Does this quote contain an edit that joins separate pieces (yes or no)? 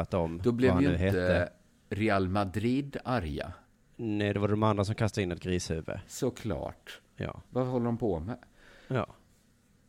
no